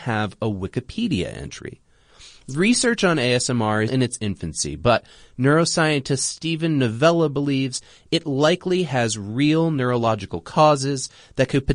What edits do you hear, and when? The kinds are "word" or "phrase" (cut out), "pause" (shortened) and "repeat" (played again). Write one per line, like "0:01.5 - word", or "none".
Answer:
0:03.9 - word